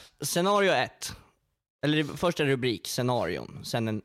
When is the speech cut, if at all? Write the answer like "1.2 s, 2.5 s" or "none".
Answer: none